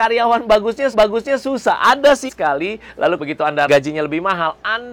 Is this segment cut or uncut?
cut